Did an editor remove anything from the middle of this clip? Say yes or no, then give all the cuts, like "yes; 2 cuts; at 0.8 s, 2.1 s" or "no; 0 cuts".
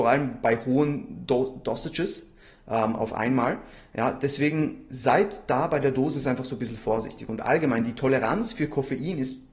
no; 0 cuts